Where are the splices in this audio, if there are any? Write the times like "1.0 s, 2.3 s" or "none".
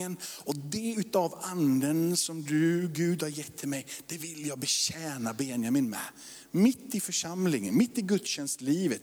none